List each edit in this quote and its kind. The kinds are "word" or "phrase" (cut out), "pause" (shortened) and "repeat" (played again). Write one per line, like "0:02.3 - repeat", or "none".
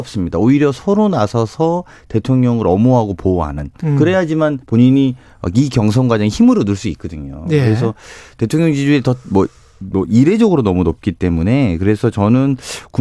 0:04.6 - pause

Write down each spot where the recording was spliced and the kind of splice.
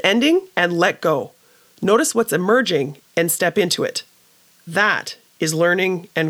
none

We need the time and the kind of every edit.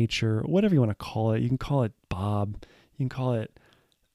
none

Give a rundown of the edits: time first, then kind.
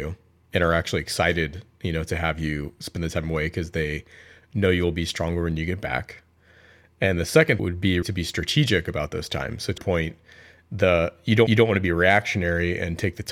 0:07.6 - word
0:08.0 - word
0:09.8 - word
0:11.5 - repeat

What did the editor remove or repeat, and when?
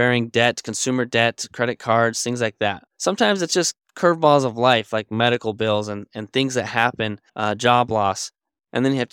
0:02.9 - pause
0:07.3 - pause

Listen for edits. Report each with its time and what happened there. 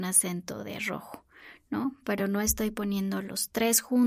none

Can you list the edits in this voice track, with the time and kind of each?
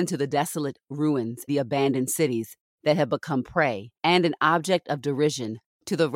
0:01.5 - word
0:03.9 - pause

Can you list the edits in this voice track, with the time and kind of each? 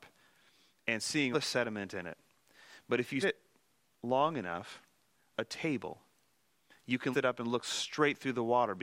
0:01.3 - word
0:03.2 - word
0:05.3 - word
0:07.1 - word

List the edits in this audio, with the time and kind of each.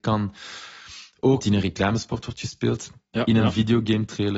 0:01.4 - phrase

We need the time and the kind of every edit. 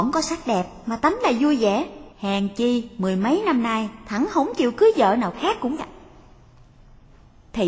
0:02.1 - pause
0:05.8 - word

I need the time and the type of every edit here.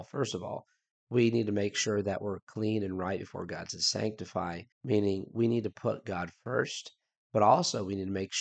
0:04.7 - pause

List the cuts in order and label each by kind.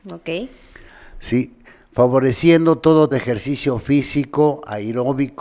0:03.1 - word

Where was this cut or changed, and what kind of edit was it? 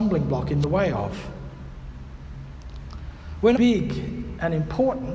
0:03.6 - word

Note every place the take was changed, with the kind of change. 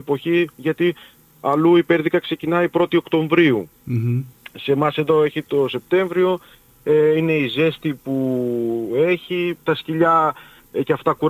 none

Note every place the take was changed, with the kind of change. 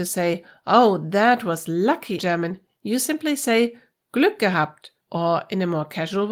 0:02.2 - word
0:05.0 - pause

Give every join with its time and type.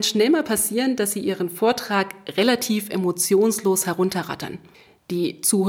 none

